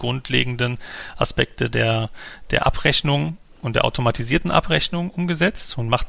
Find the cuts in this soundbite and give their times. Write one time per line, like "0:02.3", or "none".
none

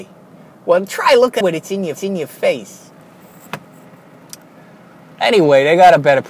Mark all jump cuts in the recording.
0:01.4
0:02.0

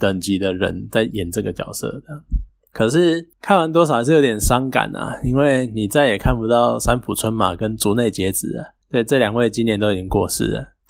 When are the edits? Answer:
none

